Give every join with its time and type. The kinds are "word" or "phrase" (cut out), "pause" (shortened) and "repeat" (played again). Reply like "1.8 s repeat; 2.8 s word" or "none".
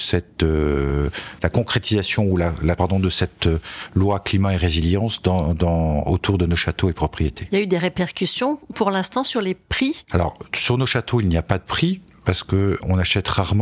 2.8 s word